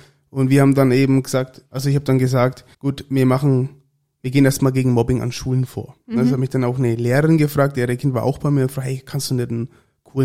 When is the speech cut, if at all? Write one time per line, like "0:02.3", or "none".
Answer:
0:02.7